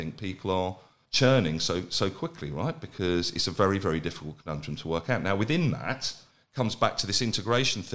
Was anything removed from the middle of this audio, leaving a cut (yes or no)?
yes